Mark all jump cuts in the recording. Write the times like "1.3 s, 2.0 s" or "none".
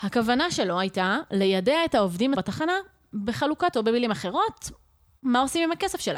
2.3 s, 3.7 s